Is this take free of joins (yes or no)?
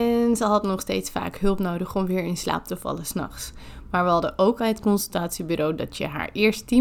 no